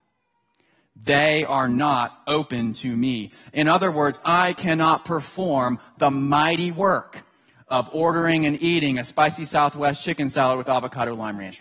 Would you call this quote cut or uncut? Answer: uncut